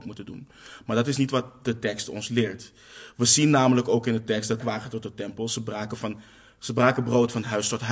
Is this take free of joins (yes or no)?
no